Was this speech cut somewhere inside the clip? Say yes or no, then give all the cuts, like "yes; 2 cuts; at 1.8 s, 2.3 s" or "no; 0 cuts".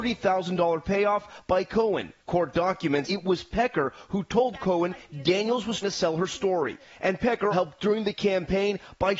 yes; 4 cuts; at 2.2 s, 3.1 s, 5.8 s, 7.5 s